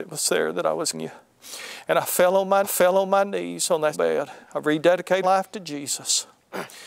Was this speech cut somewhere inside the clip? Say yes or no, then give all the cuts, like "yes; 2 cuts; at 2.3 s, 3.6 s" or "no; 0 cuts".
yes; 5 cuts; at 0.9 s, 2.6 s, 3.9 s, 4.4 s, 5.2 s